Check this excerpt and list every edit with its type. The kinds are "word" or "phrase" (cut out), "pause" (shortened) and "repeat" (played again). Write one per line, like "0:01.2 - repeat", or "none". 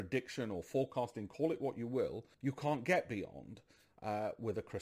0:02.3 - pause